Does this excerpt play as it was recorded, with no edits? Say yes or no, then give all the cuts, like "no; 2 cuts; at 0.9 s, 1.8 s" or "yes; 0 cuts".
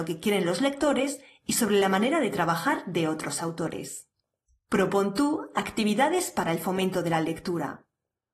yes; 0 cuts